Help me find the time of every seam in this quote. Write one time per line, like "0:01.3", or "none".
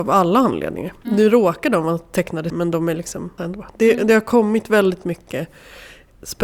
0:02.5
0:03.4